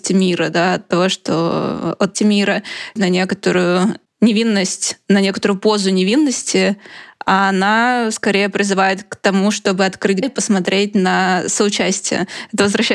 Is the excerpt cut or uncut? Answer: cut